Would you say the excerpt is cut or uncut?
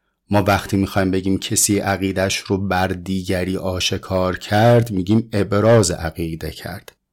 uncut